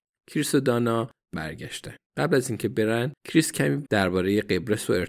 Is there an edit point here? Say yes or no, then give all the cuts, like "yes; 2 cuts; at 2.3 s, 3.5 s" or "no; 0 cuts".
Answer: yes; 4 cuts; at 1.3 s, 2.1 s, 3.2 s, 3.9 s